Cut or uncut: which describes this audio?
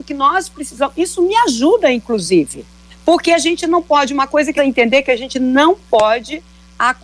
cut